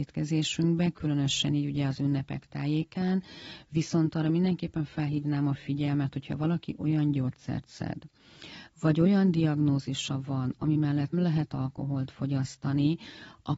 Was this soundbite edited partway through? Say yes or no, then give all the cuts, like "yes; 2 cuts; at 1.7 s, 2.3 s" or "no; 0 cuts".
yes; 1 cut; at 11.1 s